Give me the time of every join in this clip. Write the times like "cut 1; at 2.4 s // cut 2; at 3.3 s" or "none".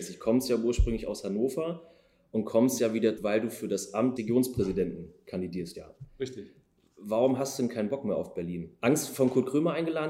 cut 1; at 2.8 s // cut 2; at 3.2 s // cut 3; at 4.2 s // cut 4; at 5.7 s